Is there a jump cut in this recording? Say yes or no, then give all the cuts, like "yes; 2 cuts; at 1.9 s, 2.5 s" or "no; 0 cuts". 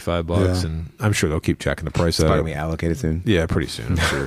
no; 0 cuts